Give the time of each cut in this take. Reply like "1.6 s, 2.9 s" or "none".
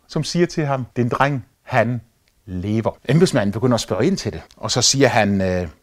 0.9 s, 1.5 s, 3.0 s, 4.5 s